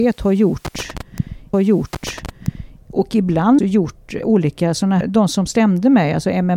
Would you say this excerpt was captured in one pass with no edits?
no; 4 cuts; at 1.5 s, 3.6 s, 4.2 s, 5.0 s

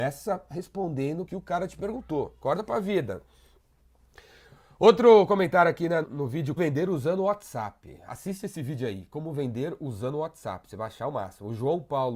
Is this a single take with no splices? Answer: no; 3 cuts; at 1.3 s, 6.0 s, 6.6 s

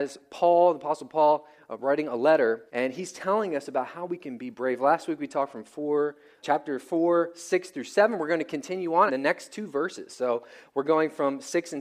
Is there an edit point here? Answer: yes; 3 cuts; at 2.7 s, 6.4 s, 9.1 s

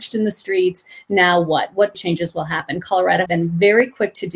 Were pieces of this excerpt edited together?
yes; 2 cuts; at 1.9 s, 3.3 s

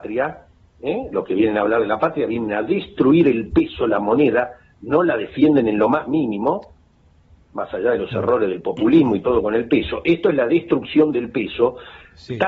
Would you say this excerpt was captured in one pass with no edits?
yes; 0 cuts

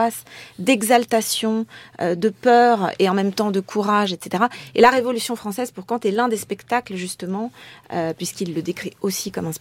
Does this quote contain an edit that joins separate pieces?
no; 0 cuts

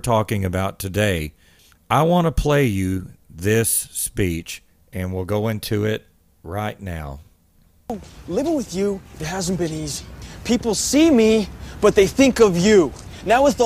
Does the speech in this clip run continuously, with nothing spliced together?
yes; 0 cuts

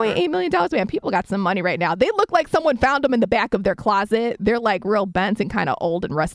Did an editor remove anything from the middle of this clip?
no; 0 cuts

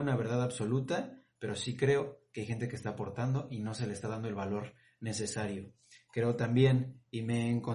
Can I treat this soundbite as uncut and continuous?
yes; 0 cuts

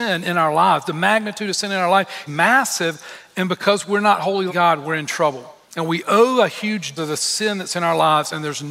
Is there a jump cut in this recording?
yes; 4 cuts; at 2.3 s, 4.5 s, 5.6 s, 7.0 s

